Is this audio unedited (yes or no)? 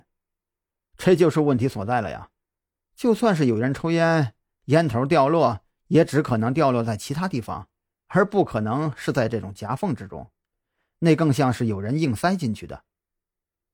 yes